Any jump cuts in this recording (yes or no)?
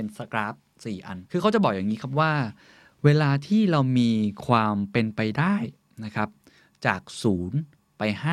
yes